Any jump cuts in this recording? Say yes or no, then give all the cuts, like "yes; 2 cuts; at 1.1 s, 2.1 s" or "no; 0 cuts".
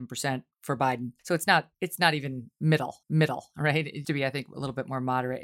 yes; 4 cuts; at 1.2 s, 1.7 s, 3.0 s, 4.0 s